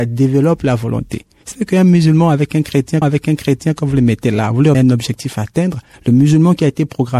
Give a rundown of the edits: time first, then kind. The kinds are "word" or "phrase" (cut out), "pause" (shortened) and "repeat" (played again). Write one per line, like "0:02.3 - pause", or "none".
0:01.5 - word
0:03.0 - repeat
0:04.7 - word

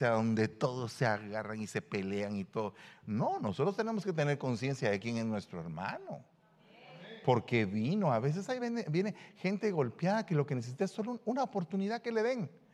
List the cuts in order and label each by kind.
none

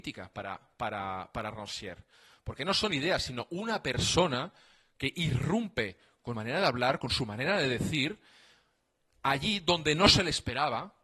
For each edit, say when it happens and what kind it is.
0:06.3 - phrase

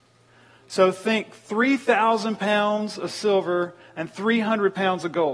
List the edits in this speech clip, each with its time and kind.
none

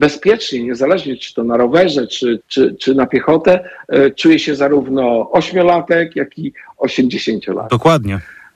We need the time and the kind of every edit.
0:02.4 - word

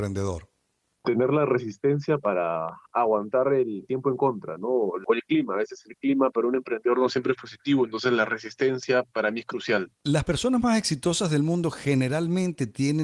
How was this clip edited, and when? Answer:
0:02.9 - pause
0:09.9 - pause

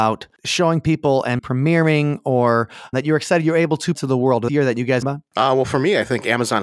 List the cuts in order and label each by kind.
0:01.4 - word
0:02.9 - word
0:03.9 - word
0:04.5 - phrase
0:05.0 - phrase

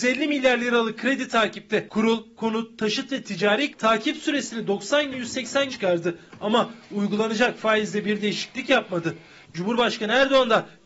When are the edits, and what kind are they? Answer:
0:02.3 - word
0:03.7 - word
0:05.1 - word
0:05.7 - word

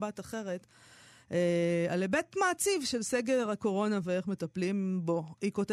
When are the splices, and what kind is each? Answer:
none

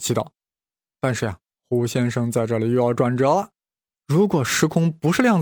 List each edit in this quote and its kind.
none

